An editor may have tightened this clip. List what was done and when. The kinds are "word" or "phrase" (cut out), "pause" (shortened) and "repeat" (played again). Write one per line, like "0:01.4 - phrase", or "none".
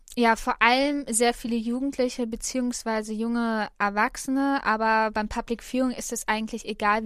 none